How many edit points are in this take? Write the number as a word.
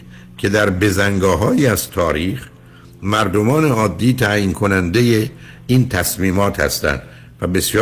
zero